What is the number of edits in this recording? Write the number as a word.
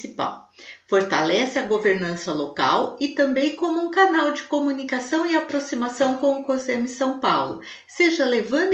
zero